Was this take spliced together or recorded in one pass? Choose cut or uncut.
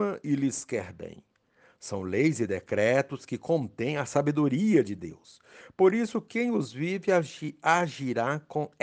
uncut